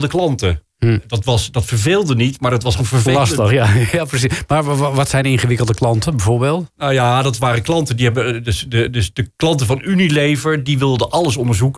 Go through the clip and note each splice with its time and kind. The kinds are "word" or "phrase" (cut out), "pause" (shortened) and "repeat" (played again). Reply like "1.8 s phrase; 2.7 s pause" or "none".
2.8 s phrase; 9.3 s pause